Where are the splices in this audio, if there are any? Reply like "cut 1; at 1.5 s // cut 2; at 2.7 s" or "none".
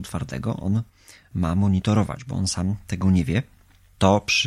none